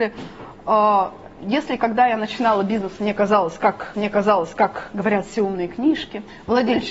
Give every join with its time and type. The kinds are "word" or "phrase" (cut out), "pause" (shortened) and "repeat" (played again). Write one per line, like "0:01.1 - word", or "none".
0:03.9 - repeat